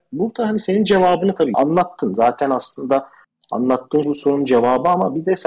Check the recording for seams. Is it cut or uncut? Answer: cut